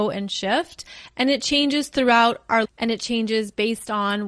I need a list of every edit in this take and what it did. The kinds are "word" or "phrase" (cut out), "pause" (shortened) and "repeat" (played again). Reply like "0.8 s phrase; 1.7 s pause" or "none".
2.6 s word